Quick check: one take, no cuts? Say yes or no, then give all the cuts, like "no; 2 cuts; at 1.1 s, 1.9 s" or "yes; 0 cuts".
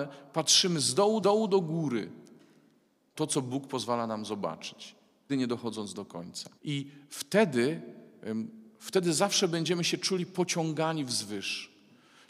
no; 4 cuts; at 1.2 s, 3.1 s, 5.3 s, 6.6 s